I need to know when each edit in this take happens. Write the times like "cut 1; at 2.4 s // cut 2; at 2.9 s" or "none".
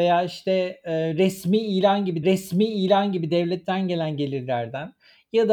cut 1; at 2.2 s